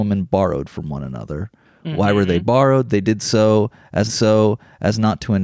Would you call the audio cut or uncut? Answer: cut